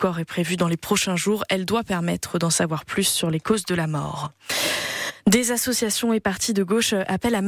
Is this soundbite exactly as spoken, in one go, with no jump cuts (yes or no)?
yes